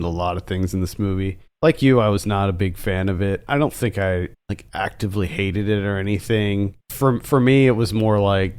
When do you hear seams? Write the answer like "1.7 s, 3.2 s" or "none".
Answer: 1.5 s, 3.5 s, 4.3 s, 6.8 s